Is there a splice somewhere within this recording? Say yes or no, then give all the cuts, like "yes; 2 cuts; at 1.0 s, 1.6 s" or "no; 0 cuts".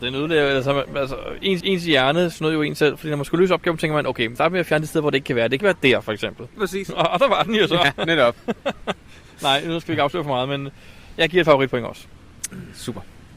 yes; 4 cuts; at 1.6 s, 4.4 s, 5.6 s, 6.6 s